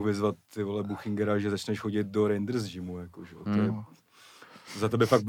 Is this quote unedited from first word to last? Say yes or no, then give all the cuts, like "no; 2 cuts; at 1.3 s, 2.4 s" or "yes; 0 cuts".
yes; 0 cuts